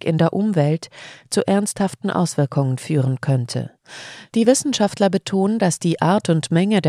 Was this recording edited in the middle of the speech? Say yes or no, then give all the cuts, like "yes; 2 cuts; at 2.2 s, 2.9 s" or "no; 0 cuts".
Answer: no; 0 cuts